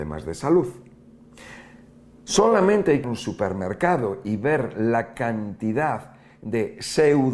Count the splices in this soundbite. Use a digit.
1